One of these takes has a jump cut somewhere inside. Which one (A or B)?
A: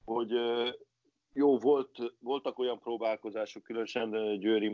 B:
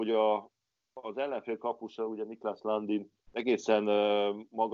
B